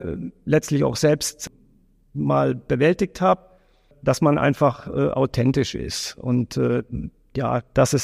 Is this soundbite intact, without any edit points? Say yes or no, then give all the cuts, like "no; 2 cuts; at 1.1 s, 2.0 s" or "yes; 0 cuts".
yes; 0 cuts